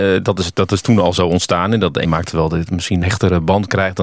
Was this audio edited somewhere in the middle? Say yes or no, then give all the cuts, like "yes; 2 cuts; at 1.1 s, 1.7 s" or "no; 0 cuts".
yes; 2 cuts; at 2.0 s, 3.0 s